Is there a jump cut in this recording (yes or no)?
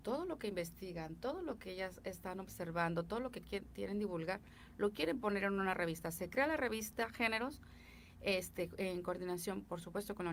no